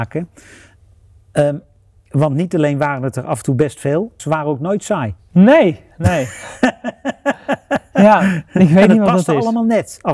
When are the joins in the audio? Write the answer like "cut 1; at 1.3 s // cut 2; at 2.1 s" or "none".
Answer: cut 1; at 4.2 s // cut 2; at 5.2 s